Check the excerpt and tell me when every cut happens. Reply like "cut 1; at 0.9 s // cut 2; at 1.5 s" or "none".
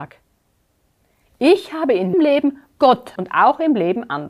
cut 1; at 2.1 s // cut 2; at 3.2 s